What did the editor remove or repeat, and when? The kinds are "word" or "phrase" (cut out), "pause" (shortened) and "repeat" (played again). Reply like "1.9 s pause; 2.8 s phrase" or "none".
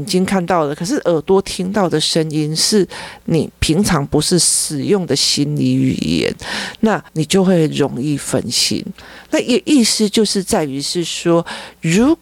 7.1 s pause